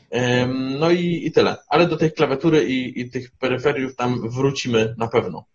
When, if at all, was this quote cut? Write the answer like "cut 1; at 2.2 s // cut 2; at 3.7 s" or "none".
none

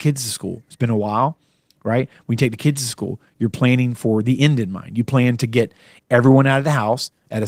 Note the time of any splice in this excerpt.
none

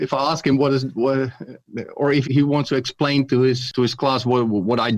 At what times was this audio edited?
cut 1; at 2.2 s

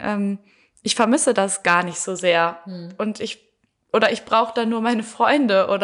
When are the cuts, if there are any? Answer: none

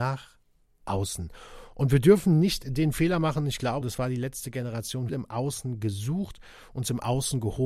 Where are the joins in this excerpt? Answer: cut 1; at 3.8 s // cut 2; at 5.1 s

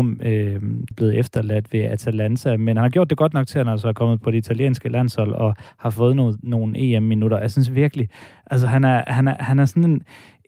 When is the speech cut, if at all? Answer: cut 1; at 0.9 s

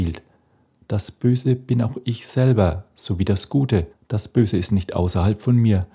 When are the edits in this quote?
cut 1; at 3.9 s

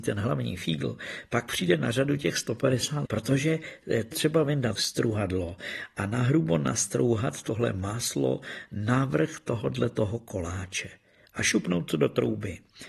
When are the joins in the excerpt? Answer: cut 1; at 3.1 s // cut 2; at 4.1 s // cut 3; at 4.8 s

